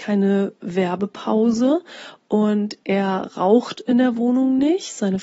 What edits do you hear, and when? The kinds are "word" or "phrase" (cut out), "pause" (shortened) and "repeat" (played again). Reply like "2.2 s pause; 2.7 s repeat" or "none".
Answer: none